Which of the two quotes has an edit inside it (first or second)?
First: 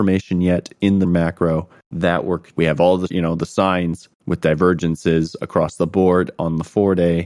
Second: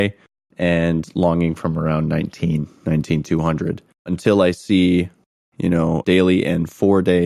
first